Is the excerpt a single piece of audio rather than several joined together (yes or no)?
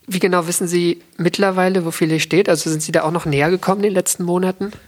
yes